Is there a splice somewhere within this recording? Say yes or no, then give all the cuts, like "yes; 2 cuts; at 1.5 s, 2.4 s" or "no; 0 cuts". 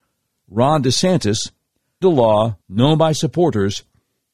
yes; 2 cuts; at 2.0 s, 2.6 s